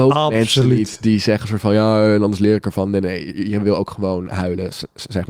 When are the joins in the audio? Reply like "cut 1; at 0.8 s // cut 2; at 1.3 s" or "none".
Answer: none